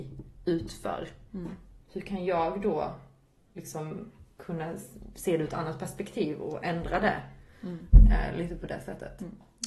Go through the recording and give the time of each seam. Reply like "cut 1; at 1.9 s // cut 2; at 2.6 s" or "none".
none